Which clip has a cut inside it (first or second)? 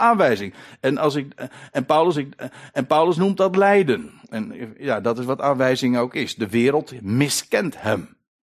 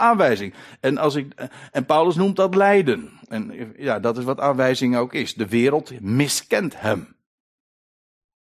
first